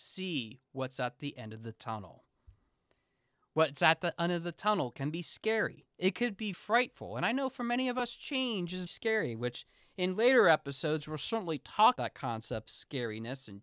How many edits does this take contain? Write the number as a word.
four